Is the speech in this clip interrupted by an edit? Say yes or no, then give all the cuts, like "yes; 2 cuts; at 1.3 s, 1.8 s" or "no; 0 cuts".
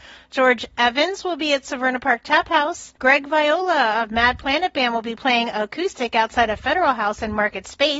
yes; 1 cut; at 3.0 s